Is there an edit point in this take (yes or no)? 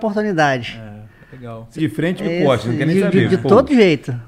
yes